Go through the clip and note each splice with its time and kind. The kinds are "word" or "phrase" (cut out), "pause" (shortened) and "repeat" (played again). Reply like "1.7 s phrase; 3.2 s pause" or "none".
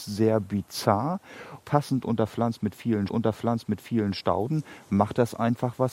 1.6 s word; 3.1 s repeat